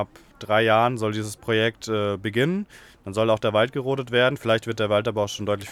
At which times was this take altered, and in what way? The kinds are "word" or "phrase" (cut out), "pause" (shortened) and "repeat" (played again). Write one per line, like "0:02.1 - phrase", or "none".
none